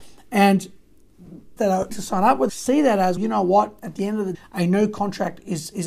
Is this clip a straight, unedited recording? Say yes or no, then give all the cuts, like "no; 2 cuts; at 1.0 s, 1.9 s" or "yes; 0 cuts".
no; 5 cuts; at 1.6 s, 1.9 s, 2.5 s, 3.2 s, 4.3 s